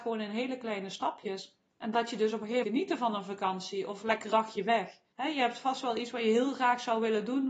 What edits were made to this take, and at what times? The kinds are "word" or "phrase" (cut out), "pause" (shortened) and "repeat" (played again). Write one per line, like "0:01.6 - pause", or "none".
0:01.7 - pause
0:02.6 - phrase
0:04.3 - word
0:05.1 - pause